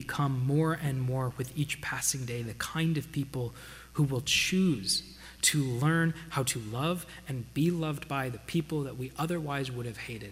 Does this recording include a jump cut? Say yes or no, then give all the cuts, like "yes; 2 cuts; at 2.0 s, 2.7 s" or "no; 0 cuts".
no; 0 cuts